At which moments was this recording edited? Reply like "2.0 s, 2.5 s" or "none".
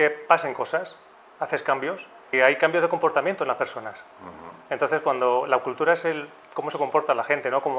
2.3 s